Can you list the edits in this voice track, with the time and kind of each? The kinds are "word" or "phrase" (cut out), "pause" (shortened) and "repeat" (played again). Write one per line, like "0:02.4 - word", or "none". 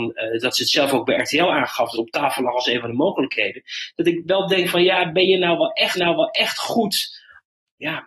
0:01.9 - word
0:06.0 - repeat

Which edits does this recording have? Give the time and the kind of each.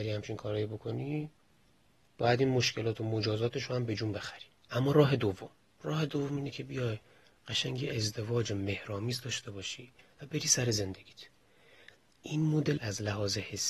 0:12.8 - word

